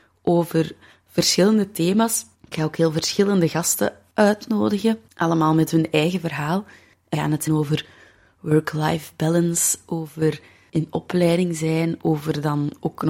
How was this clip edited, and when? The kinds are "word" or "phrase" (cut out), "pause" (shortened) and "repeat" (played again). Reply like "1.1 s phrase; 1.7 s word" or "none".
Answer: 7.1 s word; 7.5 s word